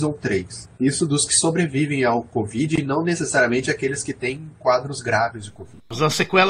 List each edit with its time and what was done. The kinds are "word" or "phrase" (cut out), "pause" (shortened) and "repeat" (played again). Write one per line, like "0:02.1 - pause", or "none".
none

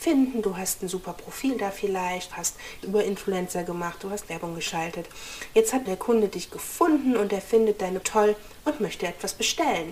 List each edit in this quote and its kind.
0:02.3 - phrase
0:02.8 - phrase
0:05.8 - word
0:08.0 - word

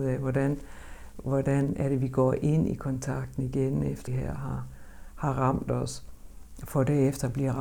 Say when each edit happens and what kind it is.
0:04.1 - word

